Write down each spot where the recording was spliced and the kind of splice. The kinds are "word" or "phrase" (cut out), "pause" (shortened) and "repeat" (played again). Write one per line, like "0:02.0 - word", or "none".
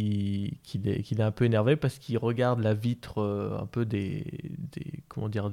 none